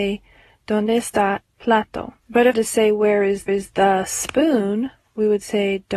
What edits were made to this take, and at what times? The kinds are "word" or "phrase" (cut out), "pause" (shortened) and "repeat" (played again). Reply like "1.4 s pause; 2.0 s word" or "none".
1.5 s word; 2.2 s pause; 2.5 s phrase; 3.5 s repeat

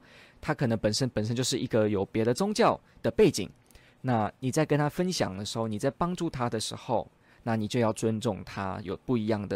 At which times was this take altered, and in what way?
none

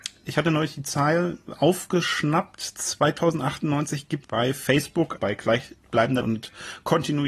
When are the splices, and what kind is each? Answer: 4.2 s word; 5.2 s word; 6.2 s word

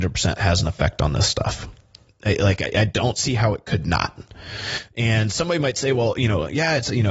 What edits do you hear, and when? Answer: 1.8 s pause

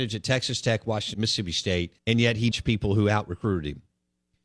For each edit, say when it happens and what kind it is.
1.1 s word; 2.0 s pause; 2.5 s phrase

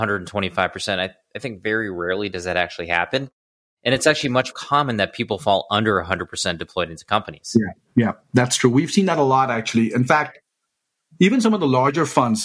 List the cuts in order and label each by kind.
4.5 s word

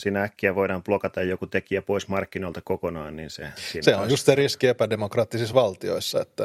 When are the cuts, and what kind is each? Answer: none

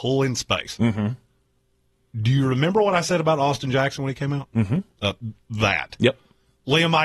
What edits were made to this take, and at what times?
none

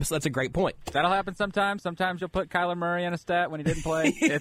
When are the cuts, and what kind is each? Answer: none

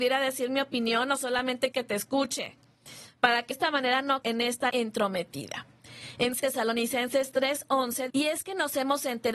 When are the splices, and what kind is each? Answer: 1.7 s word; 3.5 s word; 4.2 s word; 4.7 s word; 6.4 s word; 8.1 s word

